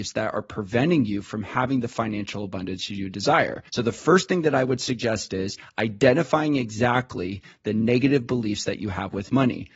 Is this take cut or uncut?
cut